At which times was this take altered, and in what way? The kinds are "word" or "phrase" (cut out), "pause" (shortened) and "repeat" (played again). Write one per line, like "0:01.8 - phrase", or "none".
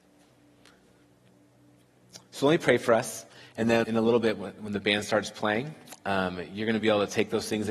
0:03.8 - word